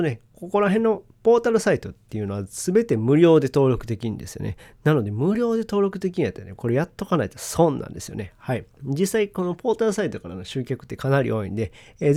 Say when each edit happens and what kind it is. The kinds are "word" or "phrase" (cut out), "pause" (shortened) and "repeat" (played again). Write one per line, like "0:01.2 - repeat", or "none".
0:08.7 - pause